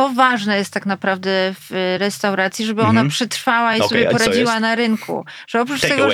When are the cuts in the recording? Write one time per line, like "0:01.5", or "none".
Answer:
none